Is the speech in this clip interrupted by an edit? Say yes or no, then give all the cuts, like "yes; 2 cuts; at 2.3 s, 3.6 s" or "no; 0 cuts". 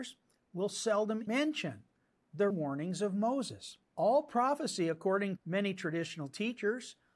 yes; 4 cuts; at 1.3 s, 2.5 s, 3.8 s, 5.4 s